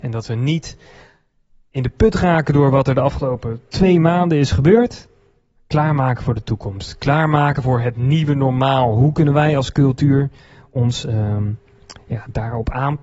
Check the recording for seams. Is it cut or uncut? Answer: uncut